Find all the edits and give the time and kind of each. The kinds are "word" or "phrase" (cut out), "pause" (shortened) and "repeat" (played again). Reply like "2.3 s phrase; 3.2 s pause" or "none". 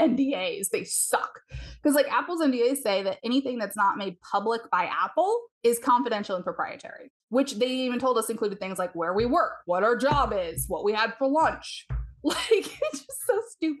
5.5 s pause; 7.2 s pause